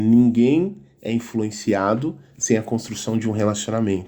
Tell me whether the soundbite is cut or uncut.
uncut